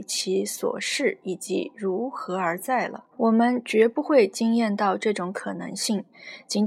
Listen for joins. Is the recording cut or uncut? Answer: cut